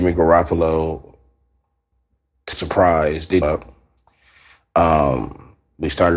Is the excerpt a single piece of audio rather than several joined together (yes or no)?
no